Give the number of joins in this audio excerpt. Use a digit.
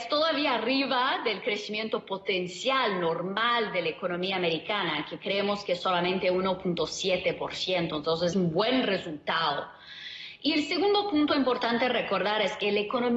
1